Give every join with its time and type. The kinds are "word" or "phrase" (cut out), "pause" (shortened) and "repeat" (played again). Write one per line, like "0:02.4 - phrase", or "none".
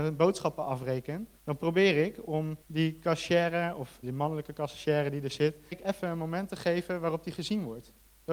0:01.4 - pause
0:02.6 - pause
0:04.0 - word
0:05.7 - word

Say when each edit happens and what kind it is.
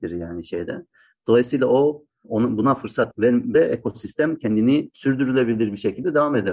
0:03.5 - phrase

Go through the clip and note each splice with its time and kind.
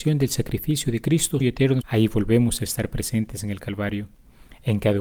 0:01.4 - word
0:01.8 - word

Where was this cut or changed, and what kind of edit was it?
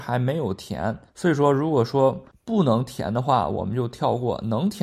0:01.1 - pause
0:02.3 - pause

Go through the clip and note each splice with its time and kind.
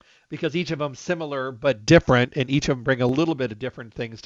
none

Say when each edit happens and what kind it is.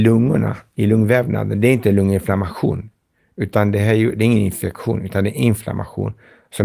none

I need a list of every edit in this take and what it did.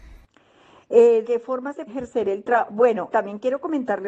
0:01.2 - word
0:01.9 - word
0:03.1 - word

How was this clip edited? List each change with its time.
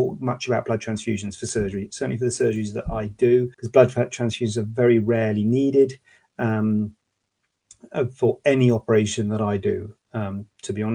0:03.5 - pause

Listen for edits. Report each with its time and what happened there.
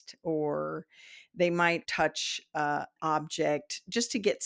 0:01.8 - word
0:03.0 - word

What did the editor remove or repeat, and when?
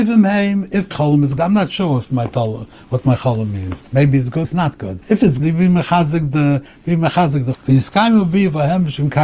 0:00.9 - word
0:01.4 - word
0:03.9 - pause
0:04.4 - word
0:05.0 - pause
0:05.4 - phrase
0:07.5 - word

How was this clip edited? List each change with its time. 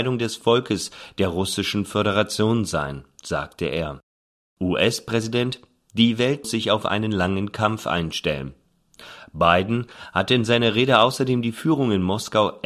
0:04.2 - pause
0:06.4 - word

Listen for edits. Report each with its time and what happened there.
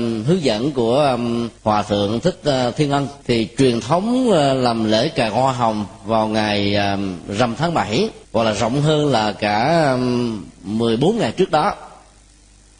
0:01.6 - pause
0:03.2 - pause
0:08.2 - pause

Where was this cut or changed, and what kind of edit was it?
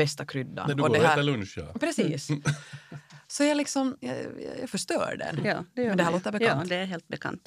none

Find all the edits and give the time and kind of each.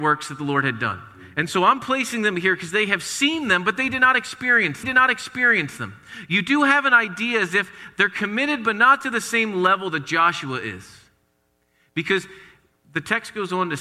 0:04.8 - repeat

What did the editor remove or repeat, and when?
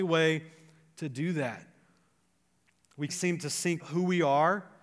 0:03.1 - word
0:03.8 - word

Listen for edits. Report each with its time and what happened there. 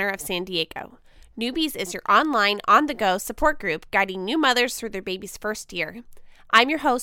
none

